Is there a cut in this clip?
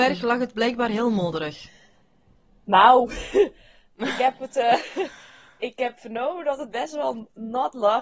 no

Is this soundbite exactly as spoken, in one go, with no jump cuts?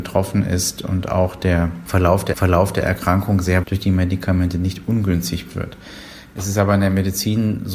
no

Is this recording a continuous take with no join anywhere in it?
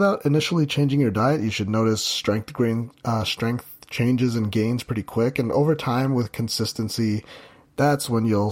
yes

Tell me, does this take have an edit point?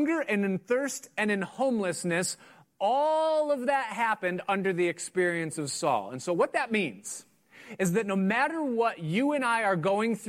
no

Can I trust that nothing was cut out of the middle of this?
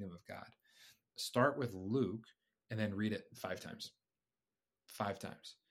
yes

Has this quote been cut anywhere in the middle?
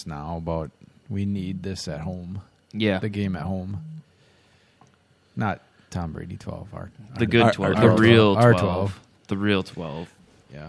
no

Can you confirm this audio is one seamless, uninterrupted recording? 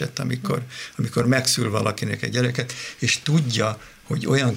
yes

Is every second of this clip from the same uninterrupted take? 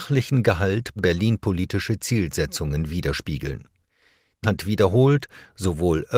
no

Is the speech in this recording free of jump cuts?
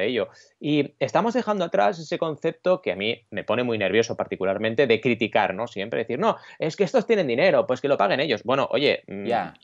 yes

